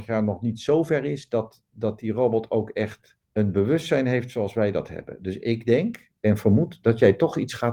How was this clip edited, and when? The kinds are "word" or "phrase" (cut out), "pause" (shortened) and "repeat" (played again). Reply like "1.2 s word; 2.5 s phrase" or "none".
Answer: 3.2 s pause

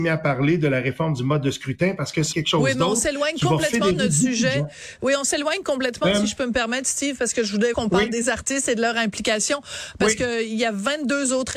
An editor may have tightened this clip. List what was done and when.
2.3 s word; 7.7 s word

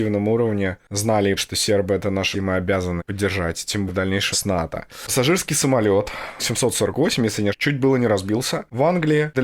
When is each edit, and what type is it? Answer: 1.4 s word; 2.3 s word; 3.0 s word; 3.9 s word; 4.3 s word; 6.4 s word; 7.5 s word

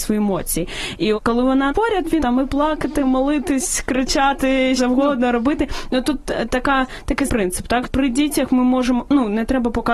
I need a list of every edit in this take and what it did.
1.2 s word; 1.7 s word; 2.2 s word; 4.8 s word; 7.3 s word; 7.8 s word

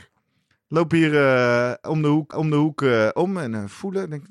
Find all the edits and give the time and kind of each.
2.3 s repeat

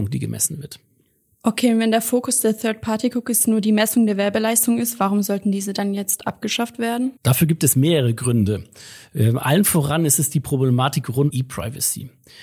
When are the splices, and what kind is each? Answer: 7.2 s pause; 11.3 s word

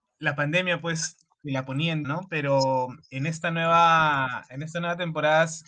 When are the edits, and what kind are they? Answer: 2.0 s word; 3.0 s pause

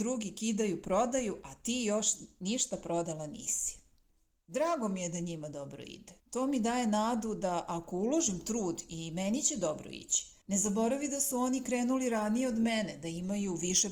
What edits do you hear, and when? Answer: 6.2 s pause; 10.4 s pause

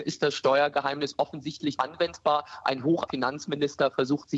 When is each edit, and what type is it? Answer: 1.8 s word; 3.1 s word

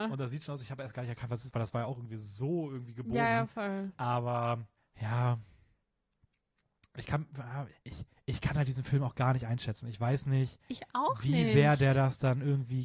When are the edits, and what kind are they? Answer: 4.8 s pause; 7.8 s pause

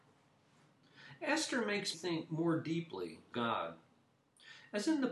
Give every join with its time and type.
1.9 s word; 3.3 s phrase

